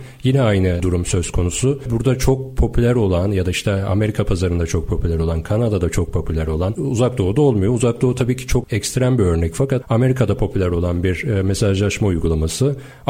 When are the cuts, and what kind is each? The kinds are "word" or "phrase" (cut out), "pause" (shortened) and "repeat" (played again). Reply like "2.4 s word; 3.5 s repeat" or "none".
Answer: 9.8 s word

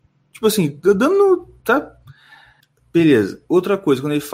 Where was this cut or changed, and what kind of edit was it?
2.6 s pause

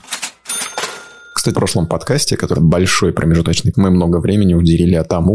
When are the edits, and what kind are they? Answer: 1.5 s phrase; 2.5 s word; 3.7 s word

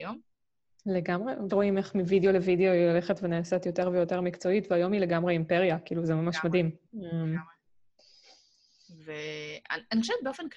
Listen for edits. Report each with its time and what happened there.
1.5 s phrase

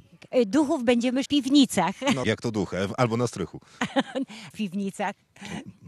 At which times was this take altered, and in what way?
1.3 s phrase; 2.2 s word; 4.5 s word

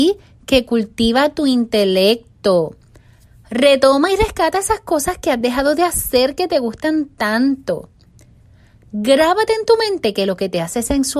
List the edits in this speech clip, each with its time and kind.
none

